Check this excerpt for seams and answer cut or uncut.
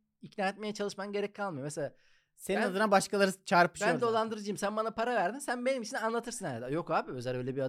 uncut